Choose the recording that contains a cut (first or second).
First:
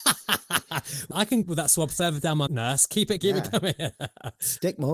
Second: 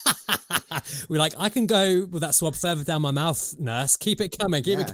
first